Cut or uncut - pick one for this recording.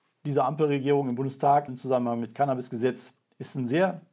cut